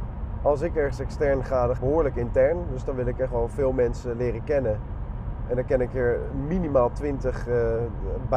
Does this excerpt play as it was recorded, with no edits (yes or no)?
no